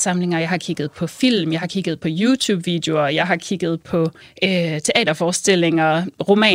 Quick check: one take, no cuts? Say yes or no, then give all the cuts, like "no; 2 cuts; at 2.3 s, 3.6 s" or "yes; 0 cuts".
no; 1 cut; at 4.2 s